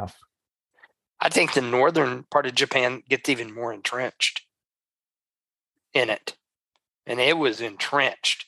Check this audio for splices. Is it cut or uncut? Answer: uncut